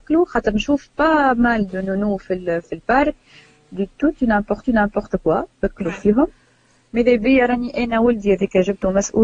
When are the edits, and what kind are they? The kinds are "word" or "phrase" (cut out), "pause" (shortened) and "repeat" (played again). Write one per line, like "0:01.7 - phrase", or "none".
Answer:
0:04.6 - repeat